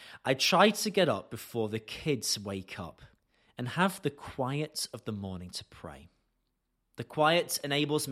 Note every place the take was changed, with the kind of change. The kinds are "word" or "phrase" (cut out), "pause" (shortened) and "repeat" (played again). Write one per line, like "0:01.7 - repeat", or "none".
none